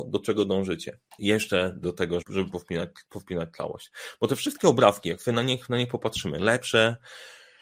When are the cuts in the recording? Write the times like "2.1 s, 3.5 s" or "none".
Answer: 1.8 s, 2.2 s